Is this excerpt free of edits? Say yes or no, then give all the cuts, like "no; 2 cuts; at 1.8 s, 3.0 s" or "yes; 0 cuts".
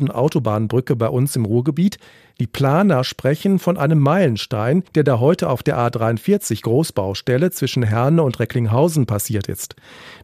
no; 1 cut; at 4.9 s